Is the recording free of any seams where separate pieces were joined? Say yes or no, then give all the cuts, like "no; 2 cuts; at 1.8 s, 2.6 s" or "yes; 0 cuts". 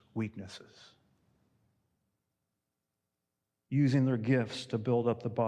yes; 0 cuts